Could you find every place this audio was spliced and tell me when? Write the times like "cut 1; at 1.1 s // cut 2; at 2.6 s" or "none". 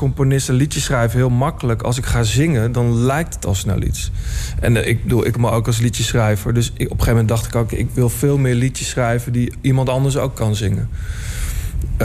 cut 1; at 5.3 s